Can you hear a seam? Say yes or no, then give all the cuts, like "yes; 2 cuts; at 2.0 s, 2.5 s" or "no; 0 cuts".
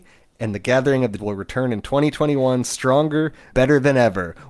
yes; 2 cuts; at 1.2 s, 3.5 s